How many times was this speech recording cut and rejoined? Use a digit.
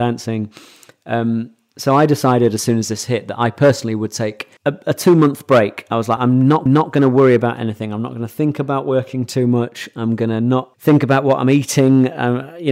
4